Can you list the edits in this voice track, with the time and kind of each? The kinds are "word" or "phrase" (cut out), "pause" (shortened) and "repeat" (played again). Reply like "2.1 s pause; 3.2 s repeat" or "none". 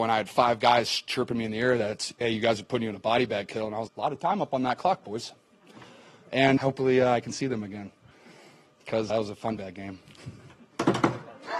3.9 s word; 6.6 s word; 9.1 s word; 9.6 s word